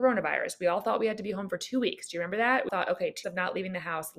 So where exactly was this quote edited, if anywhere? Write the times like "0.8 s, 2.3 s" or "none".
2.7 s, 3.2 s